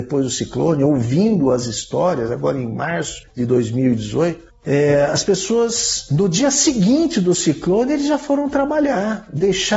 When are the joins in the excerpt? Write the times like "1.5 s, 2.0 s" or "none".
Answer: none